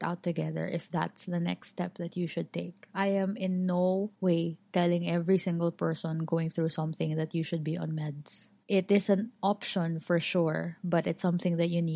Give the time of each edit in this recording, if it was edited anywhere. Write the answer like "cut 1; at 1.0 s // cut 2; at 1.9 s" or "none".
cut 1; at 4.1 s // cut 2; at 8.6 s